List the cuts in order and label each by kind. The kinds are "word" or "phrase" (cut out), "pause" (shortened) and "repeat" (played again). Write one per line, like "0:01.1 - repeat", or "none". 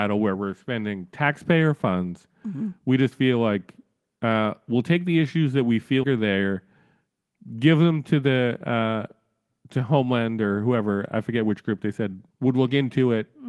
0:06.0 - word
0:12.3 - word